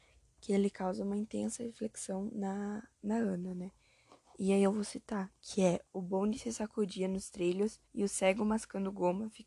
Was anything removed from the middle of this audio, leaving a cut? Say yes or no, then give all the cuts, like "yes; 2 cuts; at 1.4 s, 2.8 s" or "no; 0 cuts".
yes; 1 cut; at 7.8 s